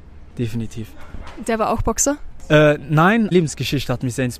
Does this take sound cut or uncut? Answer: cut